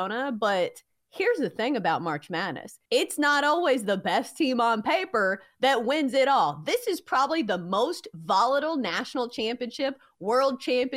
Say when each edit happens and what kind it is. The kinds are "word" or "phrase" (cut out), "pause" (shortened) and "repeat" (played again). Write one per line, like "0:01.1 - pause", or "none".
0:02.9 - pause

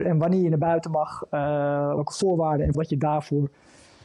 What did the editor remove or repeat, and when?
0:02.0 - word
0:02.7 - word

